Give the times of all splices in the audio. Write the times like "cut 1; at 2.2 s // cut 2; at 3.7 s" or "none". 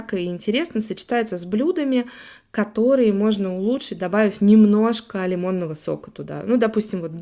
none